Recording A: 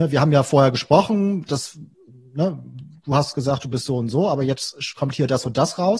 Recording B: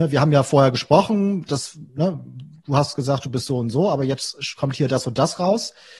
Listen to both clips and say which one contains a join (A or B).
B